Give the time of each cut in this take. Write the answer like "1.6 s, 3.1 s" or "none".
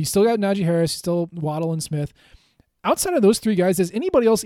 none

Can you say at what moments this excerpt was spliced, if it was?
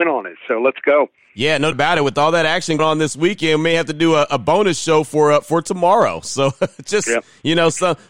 1.7 s, 2.8 s

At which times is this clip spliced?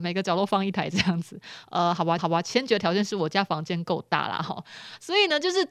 2.2 s

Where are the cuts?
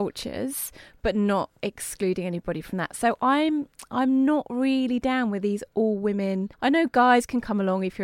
6.5 s

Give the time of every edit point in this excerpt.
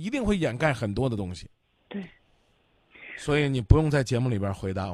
1.8 s

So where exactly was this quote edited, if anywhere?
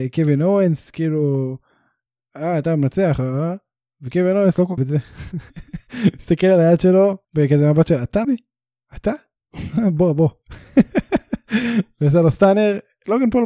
4.8 s, 7.2 s, 8.2 s

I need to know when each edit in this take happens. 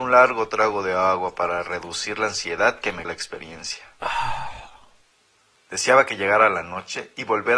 3.0 s

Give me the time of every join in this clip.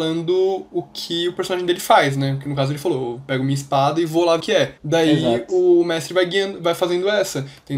4.4 s, 4.8 s

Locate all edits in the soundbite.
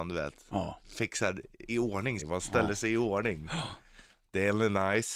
1.7 s, 2.2 s

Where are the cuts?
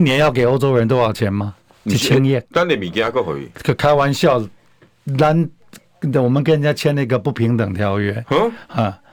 1.7 s, 2.4 s

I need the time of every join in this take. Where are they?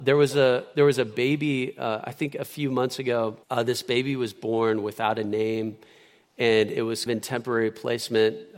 3.4 s, 7.1 s

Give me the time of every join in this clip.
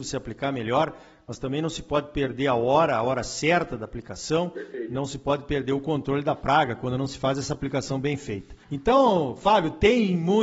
8.6 s

